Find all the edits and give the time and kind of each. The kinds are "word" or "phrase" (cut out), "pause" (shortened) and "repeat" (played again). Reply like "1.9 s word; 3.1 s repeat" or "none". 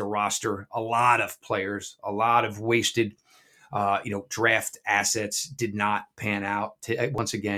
none